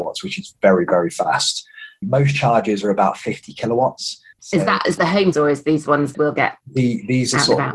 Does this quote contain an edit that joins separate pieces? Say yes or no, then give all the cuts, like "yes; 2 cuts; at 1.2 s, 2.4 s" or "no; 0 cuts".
yes; 6 cuts; at 2.0 s, 4.3 s, 5.0 s, 5.3 s, 6.1 s, 6.6 s